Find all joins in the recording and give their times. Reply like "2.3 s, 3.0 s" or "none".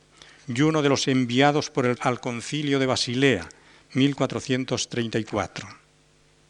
1.0 s, 1.9 s